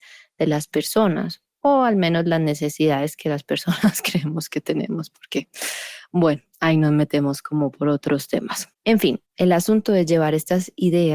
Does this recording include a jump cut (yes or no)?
yes